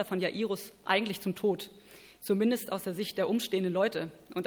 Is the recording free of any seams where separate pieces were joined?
yes; 0 cuts

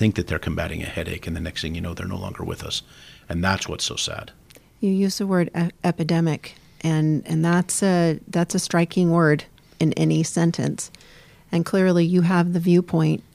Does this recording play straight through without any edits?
yes; 0 cuts

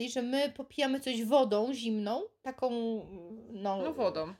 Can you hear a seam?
no; 0 cuts

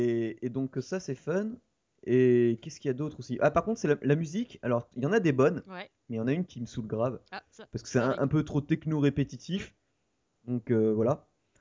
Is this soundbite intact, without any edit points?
yes; 0 cuts

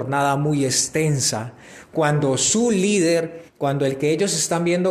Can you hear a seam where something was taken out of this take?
yes; 1 cut; at 3.5 s

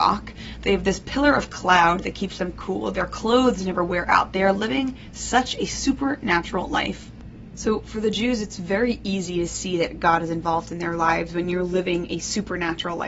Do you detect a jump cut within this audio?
no; 0 cuts

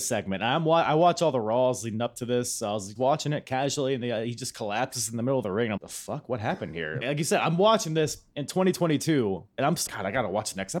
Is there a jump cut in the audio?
yes; 5 cuts; at 3.0 s, 5.8 s, 7.0 s, 9.5 s, 9.9 s

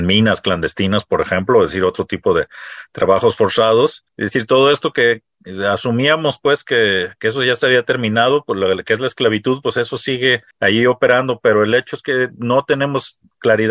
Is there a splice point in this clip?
yes; 2 cuts; at 4.1 s, 10.5 s

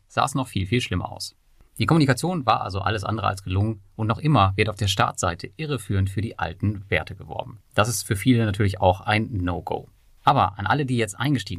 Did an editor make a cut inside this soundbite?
no; 0 cuts

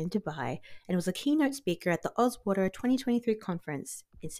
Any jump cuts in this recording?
no; 0 cuts

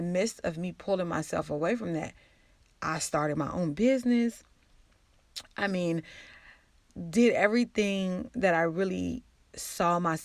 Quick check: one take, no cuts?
yes; 0 cuts

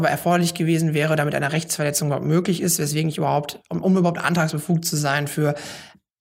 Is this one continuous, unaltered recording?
yes; 0 cuts

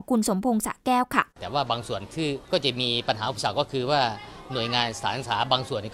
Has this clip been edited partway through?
yes; 2 cuts; at 1.3 s, 2.4 s

